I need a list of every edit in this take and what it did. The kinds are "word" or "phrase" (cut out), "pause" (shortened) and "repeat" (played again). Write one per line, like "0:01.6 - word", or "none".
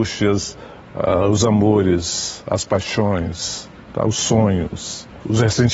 none